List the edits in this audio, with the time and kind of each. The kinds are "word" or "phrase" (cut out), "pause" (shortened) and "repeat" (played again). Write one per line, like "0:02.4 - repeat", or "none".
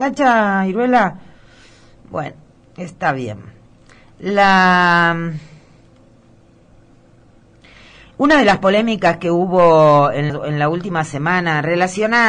0:02.6 - word
0:10.3 - word